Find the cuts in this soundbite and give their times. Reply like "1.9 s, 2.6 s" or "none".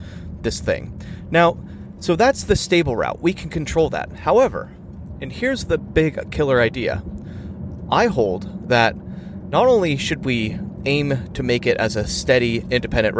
none

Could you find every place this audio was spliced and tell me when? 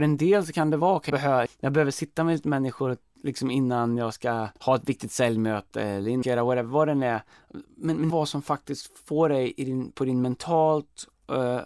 1.1 s, 1.5 s, 4.6 s, 6.2 s, 8.1 s

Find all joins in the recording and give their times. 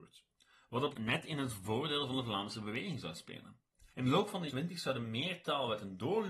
0.9 s, 3.9 s, 4.5 s

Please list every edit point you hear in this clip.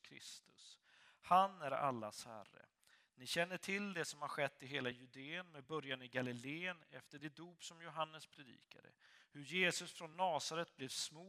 none

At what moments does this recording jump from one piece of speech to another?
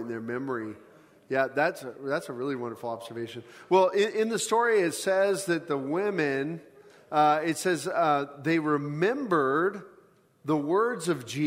none

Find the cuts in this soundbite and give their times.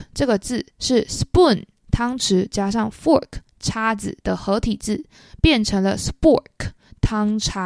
none

